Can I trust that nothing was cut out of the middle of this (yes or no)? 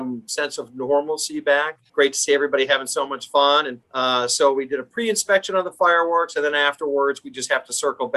no